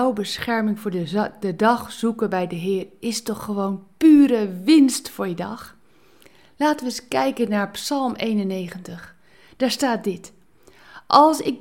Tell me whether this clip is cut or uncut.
uncut